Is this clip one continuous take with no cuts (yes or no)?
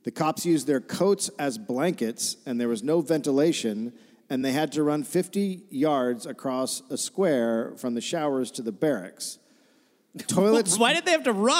yes